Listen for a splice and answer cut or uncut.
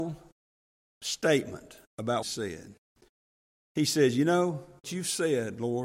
cut